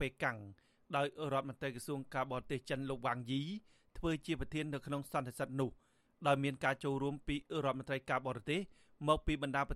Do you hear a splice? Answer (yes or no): no